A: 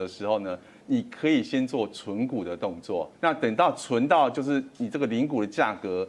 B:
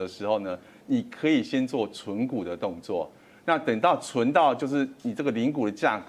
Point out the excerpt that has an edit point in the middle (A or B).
A